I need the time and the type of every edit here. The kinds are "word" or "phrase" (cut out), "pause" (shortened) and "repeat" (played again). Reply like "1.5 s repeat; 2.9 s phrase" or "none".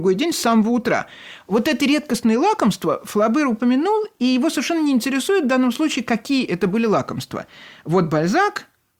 none